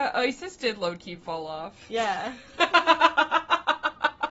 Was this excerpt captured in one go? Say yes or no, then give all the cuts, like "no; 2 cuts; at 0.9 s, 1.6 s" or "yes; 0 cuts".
yes; 0 cuts